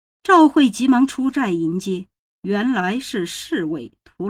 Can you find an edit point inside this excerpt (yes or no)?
no